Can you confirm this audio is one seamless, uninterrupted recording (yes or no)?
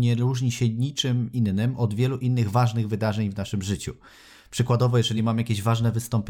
yes